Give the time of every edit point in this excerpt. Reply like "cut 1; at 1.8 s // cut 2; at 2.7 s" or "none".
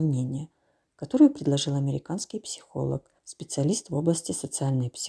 cut 1; at 3.2 s